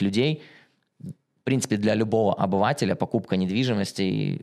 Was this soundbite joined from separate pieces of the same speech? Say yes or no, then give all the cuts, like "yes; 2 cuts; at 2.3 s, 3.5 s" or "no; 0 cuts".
no; 0 cuts